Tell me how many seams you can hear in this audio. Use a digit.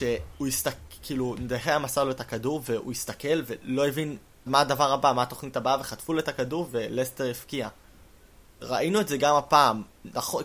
1